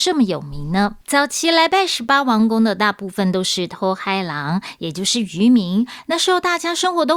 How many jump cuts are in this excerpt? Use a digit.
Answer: 1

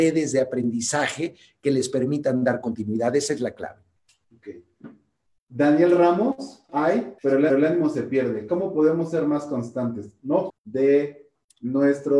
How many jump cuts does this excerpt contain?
4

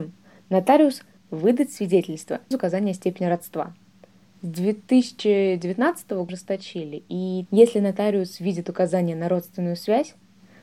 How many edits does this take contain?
4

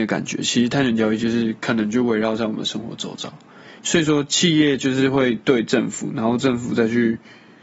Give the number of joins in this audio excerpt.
1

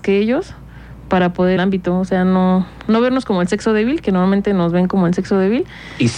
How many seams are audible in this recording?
1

